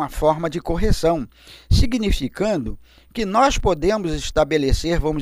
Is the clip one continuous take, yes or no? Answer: yes